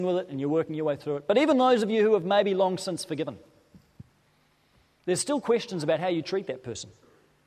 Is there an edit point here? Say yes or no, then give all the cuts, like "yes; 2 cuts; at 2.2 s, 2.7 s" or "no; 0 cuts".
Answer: no; 0 cuts